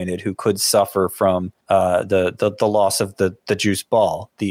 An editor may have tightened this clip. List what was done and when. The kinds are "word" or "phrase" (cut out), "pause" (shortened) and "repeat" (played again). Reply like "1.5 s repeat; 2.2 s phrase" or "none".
1.6 s pause